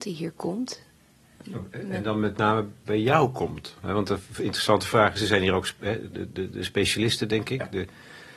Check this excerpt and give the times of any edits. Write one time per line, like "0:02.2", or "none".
none